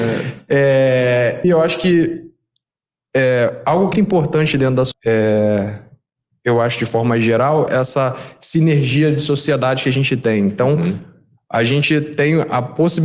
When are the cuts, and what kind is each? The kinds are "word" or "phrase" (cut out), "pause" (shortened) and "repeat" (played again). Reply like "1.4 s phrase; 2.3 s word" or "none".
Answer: 1.4 s word; 3.9 s word; 4.9 s word; 7.7 s word